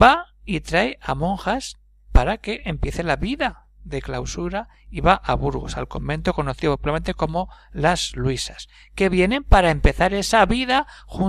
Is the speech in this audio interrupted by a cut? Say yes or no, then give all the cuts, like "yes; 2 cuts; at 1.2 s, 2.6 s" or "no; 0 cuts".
no; 0 cuts